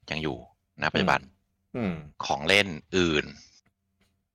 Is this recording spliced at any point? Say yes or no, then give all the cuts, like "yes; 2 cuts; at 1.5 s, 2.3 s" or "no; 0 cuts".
yes; 1 cut; at 2.1 s